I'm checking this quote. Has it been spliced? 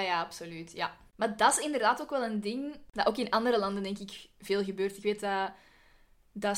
no; 0 cuts

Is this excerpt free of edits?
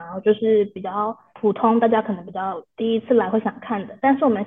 yes; 0 cuts

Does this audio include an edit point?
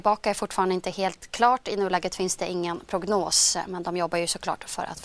no; 0 cuts

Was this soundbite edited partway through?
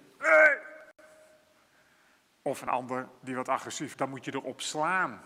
yes; 2 cuts; at 3.2 s, 3.9 s

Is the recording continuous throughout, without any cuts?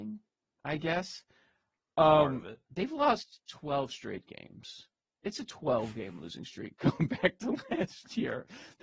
yes; 0 cuts

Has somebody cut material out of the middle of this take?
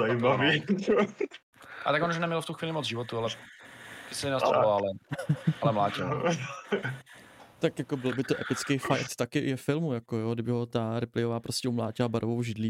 yes; 2 cuts; at 4.5 s, 7.5 s

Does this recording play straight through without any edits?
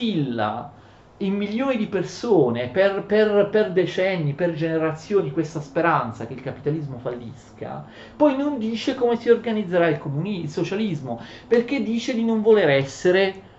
yes; 0 cuts

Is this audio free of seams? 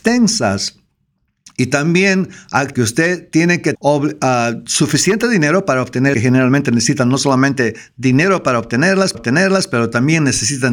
no; 4 cuts; at 2.7 s, 3.7 s, 6.1 s, 9.1 s

